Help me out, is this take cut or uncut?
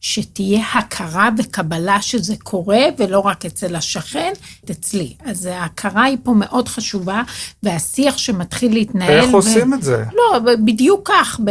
cut